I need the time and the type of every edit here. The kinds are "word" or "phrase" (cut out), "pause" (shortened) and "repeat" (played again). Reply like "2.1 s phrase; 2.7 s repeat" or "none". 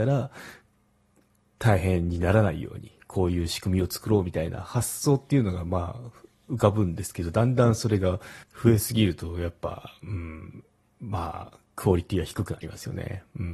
none